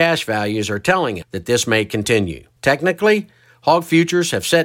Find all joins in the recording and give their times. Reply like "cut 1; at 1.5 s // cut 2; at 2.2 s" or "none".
cut 1; at 1.2 s // cut 2; at 2.6 s